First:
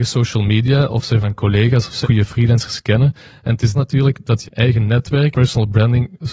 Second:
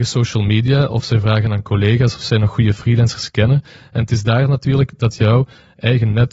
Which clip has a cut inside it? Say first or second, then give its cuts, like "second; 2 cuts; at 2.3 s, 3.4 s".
first; 5 cuts; at 1.2 s, 2.0 s, 3.7 s, 4.4 s, 5.3 s